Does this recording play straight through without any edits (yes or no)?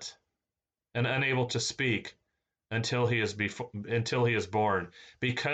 yes